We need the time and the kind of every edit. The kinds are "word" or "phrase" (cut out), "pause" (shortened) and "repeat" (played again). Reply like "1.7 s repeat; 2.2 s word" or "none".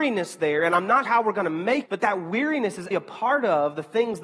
1.1 s word; 1.9 s word; 2.9 s word